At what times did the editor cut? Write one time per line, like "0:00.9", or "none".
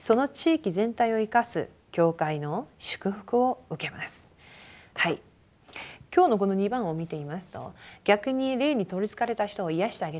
none

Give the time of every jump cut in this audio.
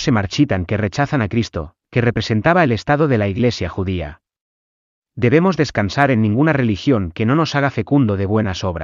none

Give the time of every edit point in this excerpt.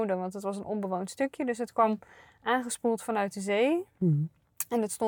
none

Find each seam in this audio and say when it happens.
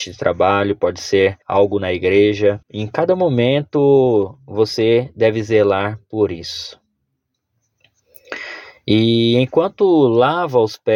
0:01.4
0:02.6

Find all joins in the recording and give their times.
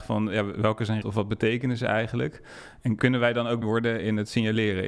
0:01.0
0:03.0
0:03.6

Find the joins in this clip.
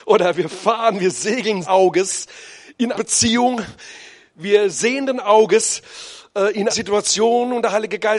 0:01.6
0:02.9
0:04.7
0:06.7

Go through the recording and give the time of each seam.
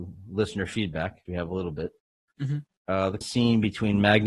0:01.3
0:03.2

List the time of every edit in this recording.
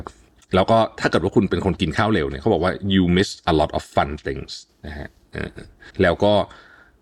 0:05.9

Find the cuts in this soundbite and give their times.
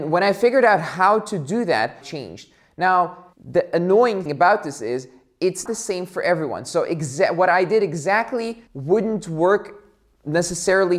0:02.0
0:03.3
0:04.3
0:05.7
0:08.7

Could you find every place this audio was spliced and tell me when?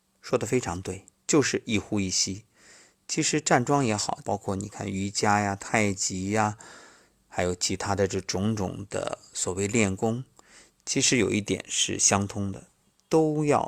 0:04.2

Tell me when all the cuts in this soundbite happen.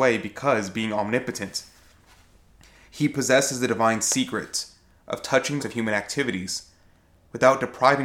0:05.6

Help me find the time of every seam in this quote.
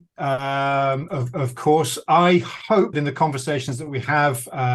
0:01.1
0:02.9

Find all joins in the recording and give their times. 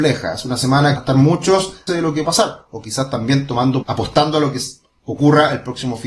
0:01.0
0:01.9
0:02.2
0:03.8

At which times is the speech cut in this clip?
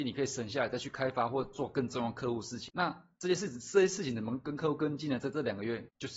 none

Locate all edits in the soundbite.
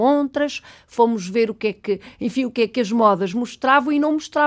none

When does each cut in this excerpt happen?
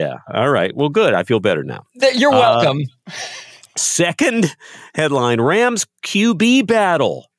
none

